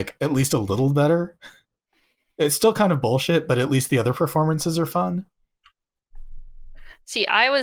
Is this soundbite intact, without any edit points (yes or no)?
yes